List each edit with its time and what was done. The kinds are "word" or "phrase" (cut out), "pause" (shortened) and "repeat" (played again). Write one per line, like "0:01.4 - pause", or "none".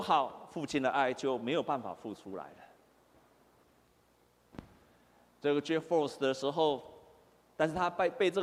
none